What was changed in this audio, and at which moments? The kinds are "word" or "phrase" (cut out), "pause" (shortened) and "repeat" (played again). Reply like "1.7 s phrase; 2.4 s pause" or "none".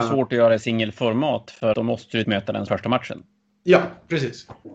1.7 s word; 2.2 s word; 2.7 s word